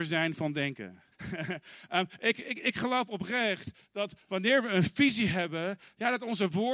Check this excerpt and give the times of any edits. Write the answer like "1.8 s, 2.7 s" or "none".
1.1 s